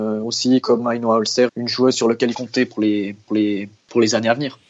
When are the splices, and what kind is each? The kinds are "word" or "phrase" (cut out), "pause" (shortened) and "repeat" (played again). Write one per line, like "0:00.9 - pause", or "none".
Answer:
0:01.5 - word
0:02.3 - word
0:03.3 - repeat